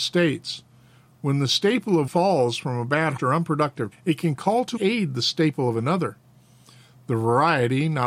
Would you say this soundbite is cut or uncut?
cut